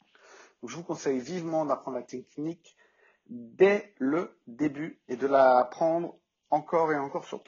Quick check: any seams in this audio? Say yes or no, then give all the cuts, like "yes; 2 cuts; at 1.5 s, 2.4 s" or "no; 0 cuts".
no; 0 cuts